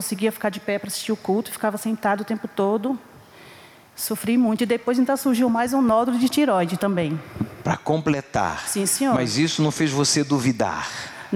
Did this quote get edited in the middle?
no; 0 cuts

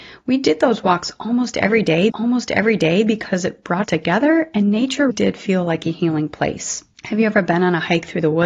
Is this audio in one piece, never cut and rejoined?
no; 4 cuts; at 2.1 s, 3.8 s, 5.1 s, 6.9 s

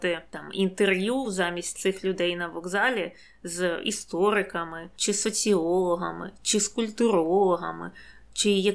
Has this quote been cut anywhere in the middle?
no; 0 cuts

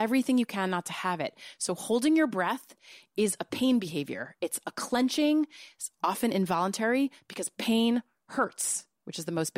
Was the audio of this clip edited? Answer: no; 0 cuts

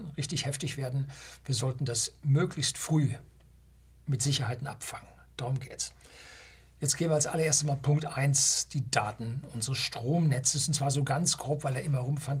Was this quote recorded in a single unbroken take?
yes; 0 cuts

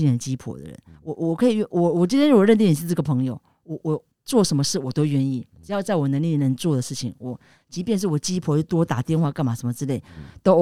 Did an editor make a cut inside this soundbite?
yes; 1 cut; at 4.1 s

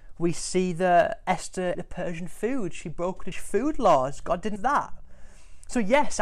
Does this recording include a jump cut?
yes; 3 cuts; at 1.7 s, 3.3 s, 4.6 s

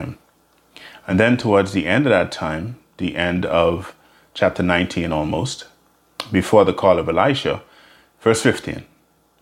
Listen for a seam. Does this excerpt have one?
no; 0 cuts

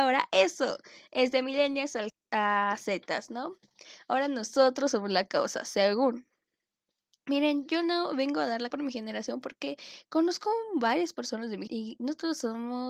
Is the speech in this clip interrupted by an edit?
yes; 3 cuts; at 2.1 s, 8.7 s, 11.7 s

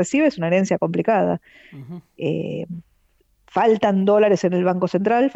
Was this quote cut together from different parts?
no; 0 cuts

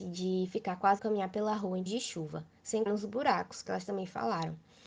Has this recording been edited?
yes; 3 cuts; at 1.0 s, 1.9 s, 2.9 s

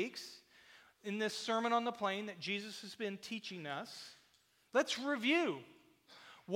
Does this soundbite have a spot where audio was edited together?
no; 0 cuts

